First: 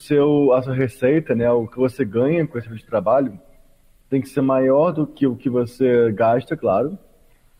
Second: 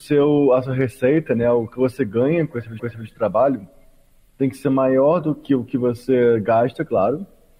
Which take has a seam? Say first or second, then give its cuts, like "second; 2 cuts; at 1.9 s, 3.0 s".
second; 1 cut; at 2.8 s